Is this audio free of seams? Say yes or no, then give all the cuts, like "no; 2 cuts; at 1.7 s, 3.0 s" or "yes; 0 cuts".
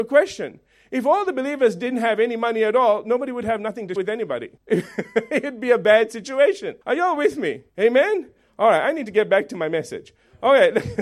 no; 4 cuts; at 4.0 s, 4.6 s, 6.8 s, 7.7 s